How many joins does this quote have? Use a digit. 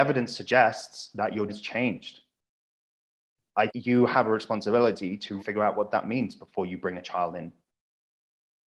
3